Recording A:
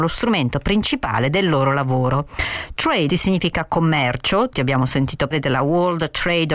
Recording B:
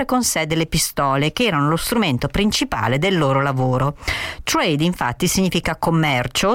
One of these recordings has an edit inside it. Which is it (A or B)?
A